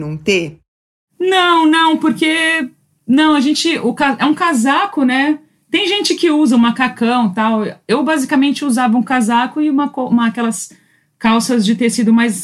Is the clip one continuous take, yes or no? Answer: yes